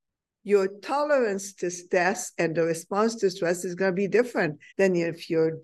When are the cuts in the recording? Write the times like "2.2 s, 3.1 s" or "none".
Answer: 4.7 s